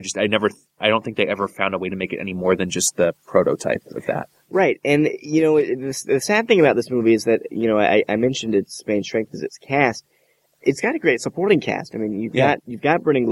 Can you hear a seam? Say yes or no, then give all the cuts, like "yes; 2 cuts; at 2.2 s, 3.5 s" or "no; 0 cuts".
no; 0 cuts